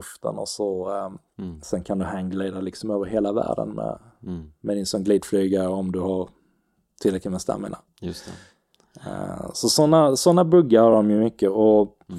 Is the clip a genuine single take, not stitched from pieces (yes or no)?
yes